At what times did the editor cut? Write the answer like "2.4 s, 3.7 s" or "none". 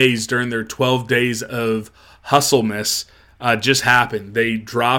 none